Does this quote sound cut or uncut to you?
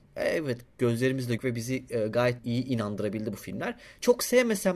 cut